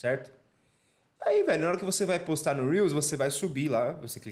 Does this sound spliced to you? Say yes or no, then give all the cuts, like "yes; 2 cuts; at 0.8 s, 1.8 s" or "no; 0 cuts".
no; 0 cuts